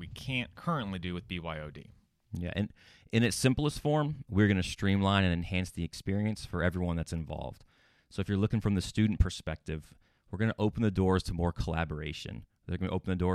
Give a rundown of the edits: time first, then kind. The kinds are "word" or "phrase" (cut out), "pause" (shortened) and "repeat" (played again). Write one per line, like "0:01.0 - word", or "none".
none